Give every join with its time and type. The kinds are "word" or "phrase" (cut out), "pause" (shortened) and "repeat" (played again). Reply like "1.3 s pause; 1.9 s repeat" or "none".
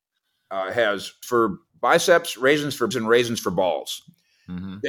1.2 s word; 2.9 s word